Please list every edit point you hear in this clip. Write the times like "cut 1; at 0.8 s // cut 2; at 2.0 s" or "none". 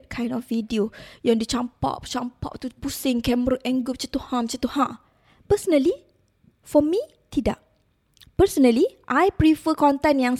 none